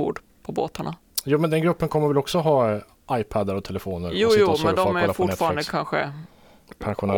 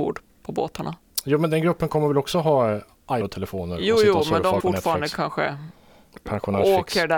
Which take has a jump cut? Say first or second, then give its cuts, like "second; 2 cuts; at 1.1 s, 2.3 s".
second; 2 cuts; at 3.2 s, 4.6 s